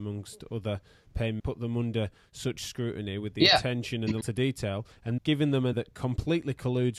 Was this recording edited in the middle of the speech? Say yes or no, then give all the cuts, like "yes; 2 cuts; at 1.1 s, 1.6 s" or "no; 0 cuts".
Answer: yes; 4 cuts; at 1.4 s, 4.2 s, 5.2 s, 5.7 s